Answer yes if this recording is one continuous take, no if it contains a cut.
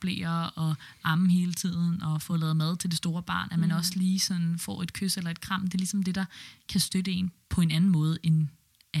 yes